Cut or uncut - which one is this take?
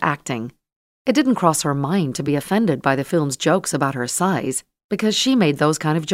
uncut